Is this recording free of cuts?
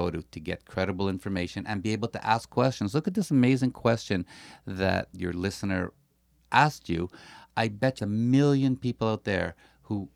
no; 2 cuts; at 5.1 s, 8.0 s

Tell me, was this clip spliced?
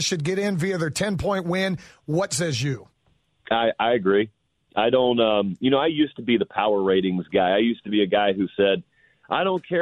no; 0 cuts

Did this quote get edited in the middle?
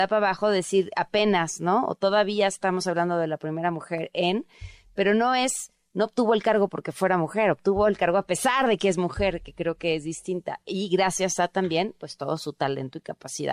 no; 0 cuts

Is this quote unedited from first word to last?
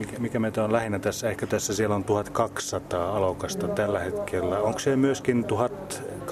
no; 1 cut; at 1.5 s

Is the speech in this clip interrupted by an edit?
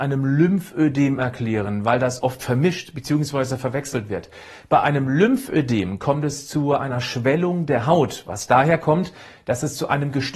no; 0 cuts

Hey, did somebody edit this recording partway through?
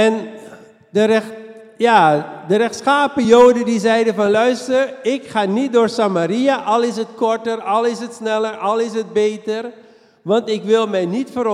no; 0 cuts

